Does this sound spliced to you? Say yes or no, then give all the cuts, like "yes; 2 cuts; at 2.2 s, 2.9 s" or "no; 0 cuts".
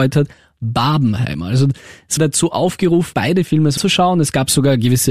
yes; 3 cuts; at 2.2 s, 3.1 s, 3.8 s